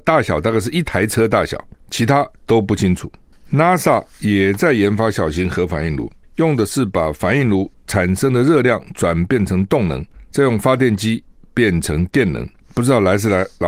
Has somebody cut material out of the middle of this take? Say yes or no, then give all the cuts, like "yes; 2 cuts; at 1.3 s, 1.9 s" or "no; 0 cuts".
no; 0 cuts